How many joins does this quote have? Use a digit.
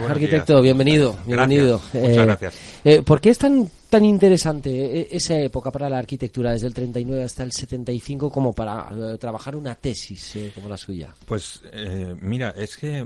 0